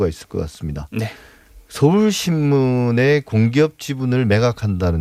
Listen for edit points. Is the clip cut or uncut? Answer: uncut